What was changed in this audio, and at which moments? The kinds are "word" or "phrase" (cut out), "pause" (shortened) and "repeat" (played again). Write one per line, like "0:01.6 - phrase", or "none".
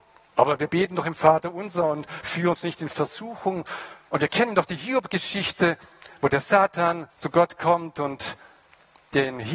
0:07.1 - pause